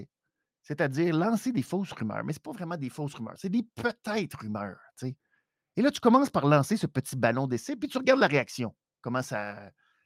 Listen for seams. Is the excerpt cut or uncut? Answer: uncut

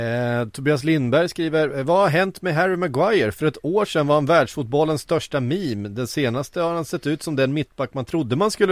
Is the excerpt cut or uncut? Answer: uncut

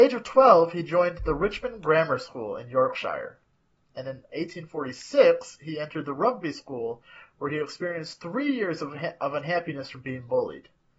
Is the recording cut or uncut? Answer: uncut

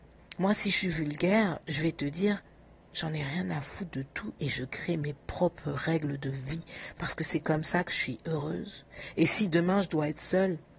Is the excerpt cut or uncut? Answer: uncut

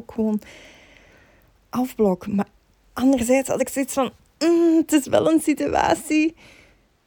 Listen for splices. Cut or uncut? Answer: uncut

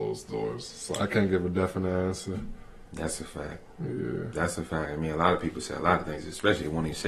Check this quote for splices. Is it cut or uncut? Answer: uncut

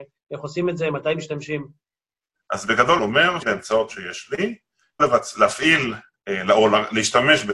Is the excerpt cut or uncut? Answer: cut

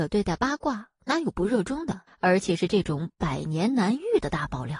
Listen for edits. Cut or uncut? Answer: cut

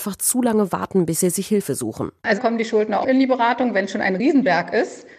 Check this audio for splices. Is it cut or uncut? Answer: cut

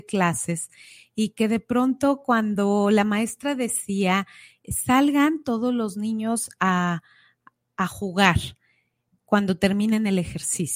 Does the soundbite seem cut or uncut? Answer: uncut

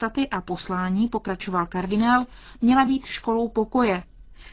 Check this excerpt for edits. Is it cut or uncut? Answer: uncut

